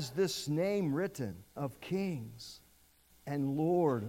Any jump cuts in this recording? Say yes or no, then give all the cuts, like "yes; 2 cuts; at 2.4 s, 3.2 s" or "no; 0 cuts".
yes; 1 cut; at 1.6 s